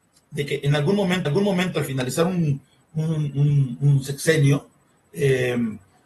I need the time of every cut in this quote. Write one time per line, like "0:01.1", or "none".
0:01.2

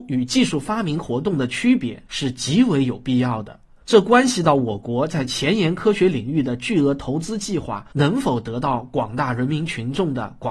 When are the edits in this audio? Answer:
0:02.1
0:03.8
0:07.9

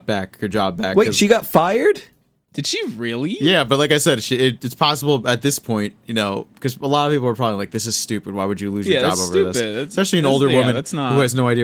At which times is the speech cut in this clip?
none

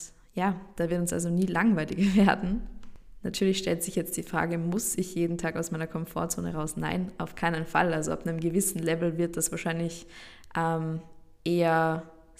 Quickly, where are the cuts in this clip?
none

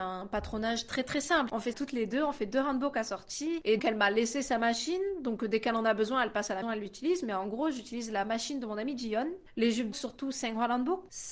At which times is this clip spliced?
0:01.7
0:03.8
0:06.6
0:09.9

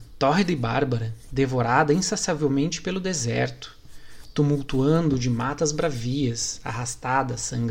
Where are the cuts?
none

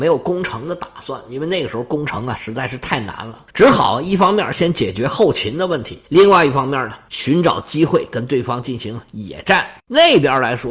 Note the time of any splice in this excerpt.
0:03.5
0:06.1

